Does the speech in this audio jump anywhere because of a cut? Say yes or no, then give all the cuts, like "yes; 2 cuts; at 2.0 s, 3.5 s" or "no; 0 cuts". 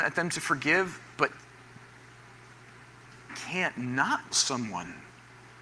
yes; 2 cuts; at 3.3 s, 4.3 s